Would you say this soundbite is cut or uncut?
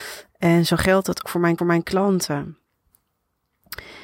cut